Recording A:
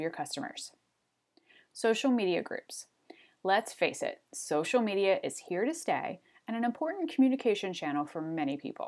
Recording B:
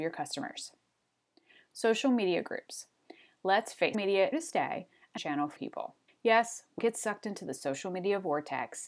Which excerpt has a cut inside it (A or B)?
B